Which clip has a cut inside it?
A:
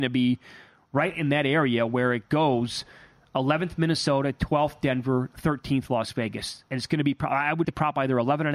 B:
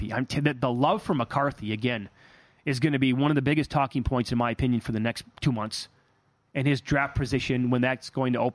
A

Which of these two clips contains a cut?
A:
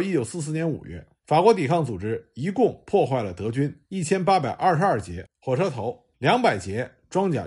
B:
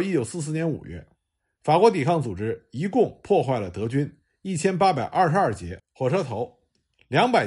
A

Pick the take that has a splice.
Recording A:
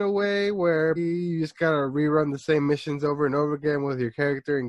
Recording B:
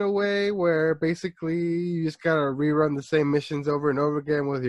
A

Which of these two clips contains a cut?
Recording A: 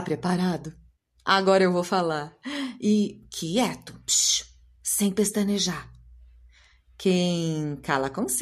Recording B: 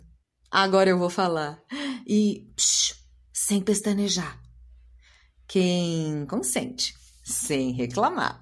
B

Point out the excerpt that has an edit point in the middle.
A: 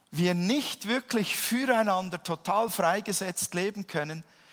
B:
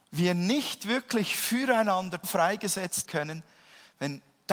B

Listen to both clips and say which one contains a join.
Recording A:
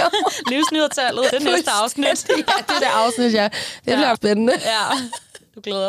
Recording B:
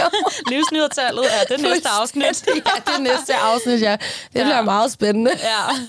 A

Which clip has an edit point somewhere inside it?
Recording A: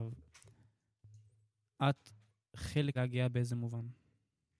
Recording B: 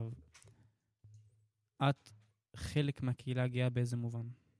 A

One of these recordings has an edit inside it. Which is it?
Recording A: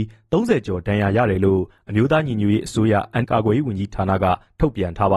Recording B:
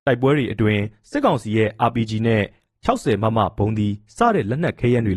A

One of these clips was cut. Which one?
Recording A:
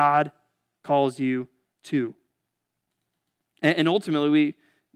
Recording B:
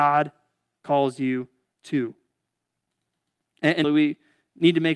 B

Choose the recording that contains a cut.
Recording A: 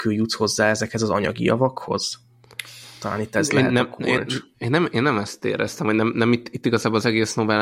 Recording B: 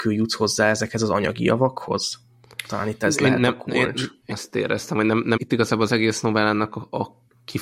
B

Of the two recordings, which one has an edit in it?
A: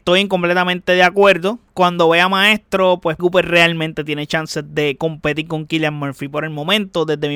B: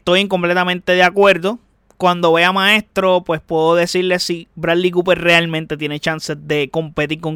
A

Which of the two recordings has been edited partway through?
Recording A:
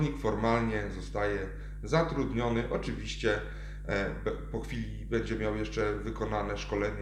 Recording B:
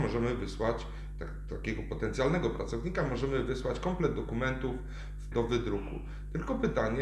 B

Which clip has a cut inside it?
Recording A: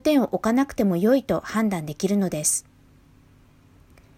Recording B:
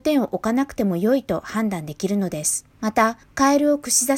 B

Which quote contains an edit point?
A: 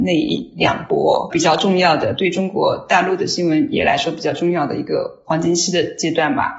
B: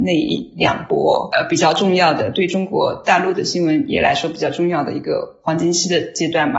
A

